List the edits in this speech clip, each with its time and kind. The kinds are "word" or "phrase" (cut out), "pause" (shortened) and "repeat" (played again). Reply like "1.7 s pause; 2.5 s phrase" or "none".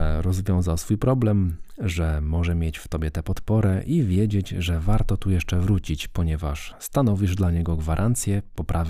none